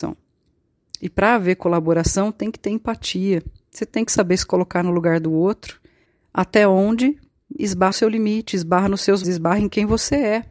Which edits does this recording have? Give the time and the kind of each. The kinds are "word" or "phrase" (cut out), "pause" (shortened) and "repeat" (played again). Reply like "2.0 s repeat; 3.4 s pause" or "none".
6.1 s pause; 7.9 s word; 9.2 s word